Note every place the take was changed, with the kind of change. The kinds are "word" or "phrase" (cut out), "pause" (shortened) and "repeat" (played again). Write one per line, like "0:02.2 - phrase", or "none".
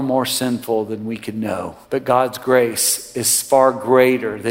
0:01.8 - pause